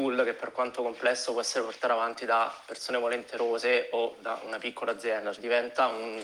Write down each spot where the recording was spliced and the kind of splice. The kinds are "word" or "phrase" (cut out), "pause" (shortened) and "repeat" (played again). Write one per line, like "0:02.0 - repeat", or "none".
0:05.3 - word